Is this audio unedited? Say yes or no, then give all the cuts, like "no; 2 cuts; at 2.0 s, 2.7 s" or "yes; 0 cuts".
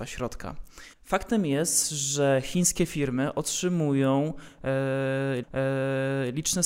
no; 2 cuts; at 0.9 s, 5.4 s